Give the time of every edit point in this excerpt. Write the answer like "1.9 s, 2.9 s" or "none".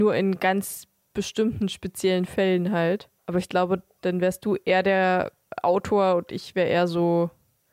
3.2 s